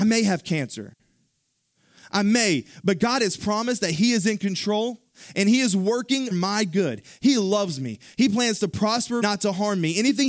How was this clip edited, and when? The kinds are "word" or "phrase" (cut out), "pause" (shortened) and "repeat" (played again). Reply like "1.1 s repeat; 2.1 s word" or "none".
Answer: 6.3 s word; 9.2 s phrase